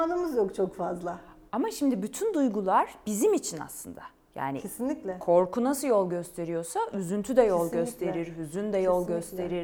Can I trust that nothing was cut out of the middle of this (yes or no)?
yes